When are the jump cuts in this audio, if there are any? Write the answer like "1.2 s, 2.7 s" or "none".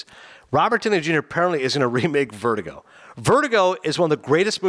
none